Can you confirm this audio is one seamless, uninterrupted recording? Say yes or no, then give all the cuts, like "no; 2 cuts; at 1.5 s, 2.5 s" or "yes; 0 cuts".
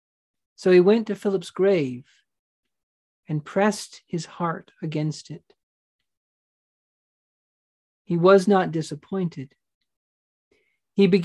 yes; 0 cuts